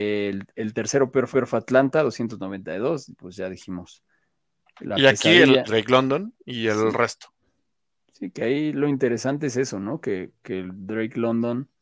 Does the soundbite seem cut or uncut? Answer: cut